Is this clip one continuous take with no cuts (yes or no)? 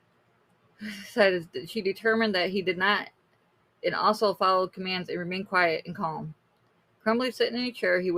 yes